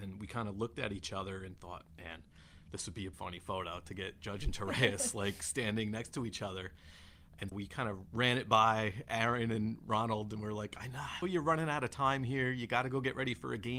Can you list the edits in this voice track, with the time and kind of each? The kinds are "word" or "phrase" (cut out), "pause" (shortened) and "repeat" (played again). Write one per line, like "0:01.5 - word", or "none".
0:03.1 - word
0:07.5 - word
0:11.2 - phrase

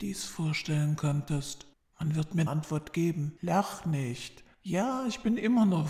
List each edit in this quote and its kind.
0:01.7 - pause
0:02.5 - word
0:03.4 - pause

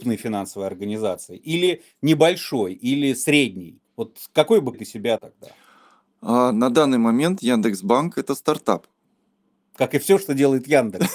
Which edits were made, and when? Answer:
0:03.8 - pause
0:04.7 - word
0:05.2 - word
0:09.3 - pause

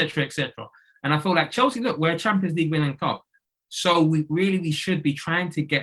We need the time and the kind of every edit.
none

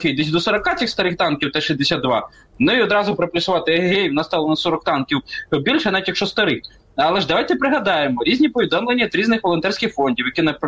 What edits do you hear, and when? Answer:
none

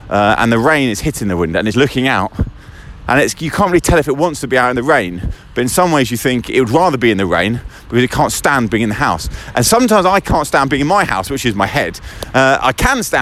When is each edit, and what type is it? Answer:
0:01.7 - word

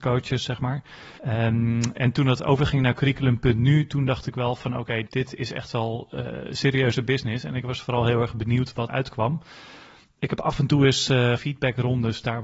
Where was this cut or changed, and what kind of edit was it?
0:01.2 - pause
0:05.1 - word
0:08.9 - word
0:11.4 - phrase

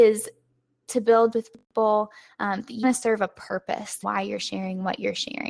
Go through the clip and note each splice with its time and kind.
0:01.3 - word
0:02.8 - word
0:04.0 - word

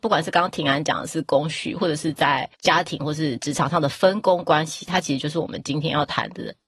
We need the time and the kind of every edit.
0:02.5 - pause

